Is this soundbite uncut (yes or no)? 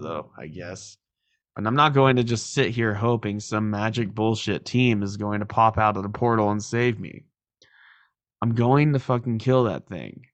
yes